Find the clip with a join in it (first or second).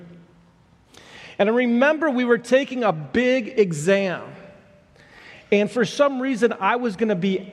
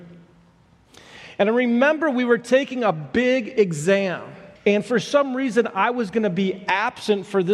second